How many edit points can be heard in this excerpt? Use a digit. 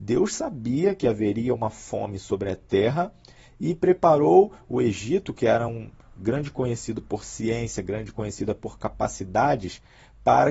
0